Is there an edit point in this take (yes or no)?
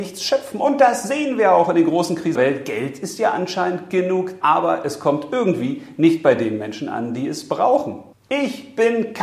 yes